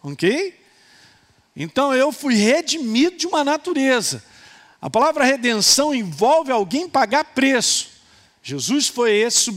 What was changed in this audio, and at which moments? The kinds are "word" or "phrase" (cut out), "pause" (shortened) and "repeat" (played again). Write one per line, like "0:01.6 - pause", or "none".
none